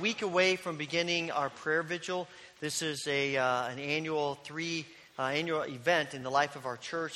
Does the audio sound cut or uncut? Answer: uncut